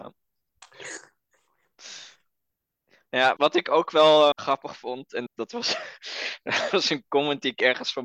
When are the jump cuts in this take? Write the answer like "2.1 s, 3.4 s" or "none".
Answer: 3.4 s, 4.3 s, 5.3 s, 6.7 s

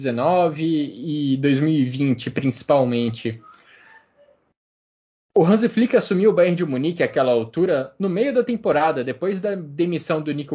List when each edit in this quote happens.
none

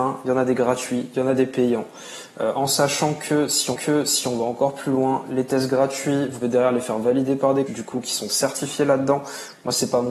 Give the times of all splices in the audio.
3.7 s, 6.4 s, 7.7 s

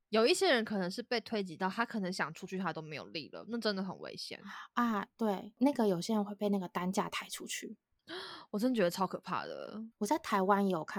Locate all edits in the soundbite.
7.9 s, 9.9 s

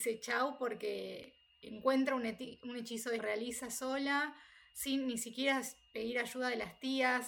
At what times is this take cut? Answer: 1.5 s, 3.2 s

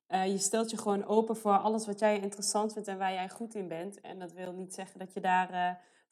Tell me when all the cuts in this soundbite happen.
none

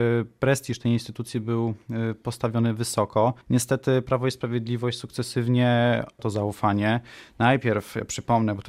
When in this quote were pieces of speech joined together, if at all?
3.4 s, 6.2 s

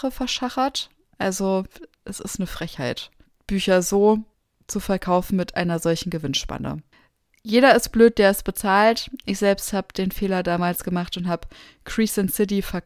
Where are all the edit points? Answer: none

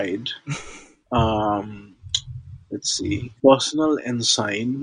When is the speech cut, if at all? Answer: 3.4 s

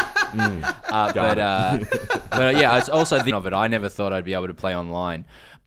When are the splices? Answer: 3.3 s

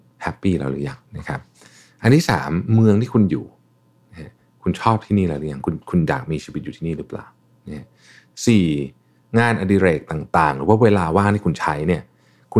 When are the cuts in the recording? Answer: 1.1 s

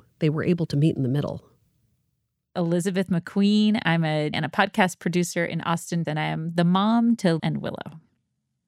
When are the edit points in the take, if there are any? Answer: 4.3 s, 6.0 s, 7.4 s

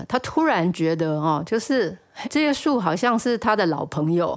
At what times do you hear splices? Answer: 2.2 s

